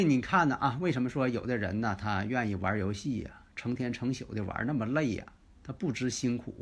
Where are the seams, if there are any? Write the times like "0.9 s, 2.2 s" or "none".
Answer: none